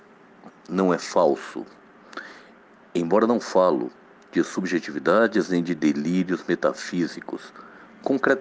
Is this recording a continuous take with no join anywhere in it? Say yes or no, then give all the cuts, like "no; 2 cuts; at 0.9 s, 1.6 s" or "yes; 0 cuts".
yes; 0 cuts